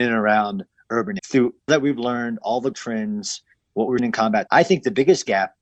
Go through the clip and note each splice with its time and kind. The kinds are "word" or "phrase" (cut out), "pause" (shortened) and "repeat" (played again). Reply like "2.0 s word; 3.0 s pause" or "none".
1.2 s word; 1.7 s word; 2.7 s word; 4.0 s word; 4.5 s word